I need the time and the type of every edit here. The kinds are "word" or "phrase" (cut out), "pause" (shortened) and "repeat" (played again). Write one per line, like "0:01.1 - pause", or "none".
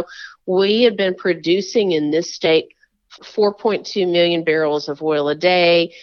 0:03.2 - word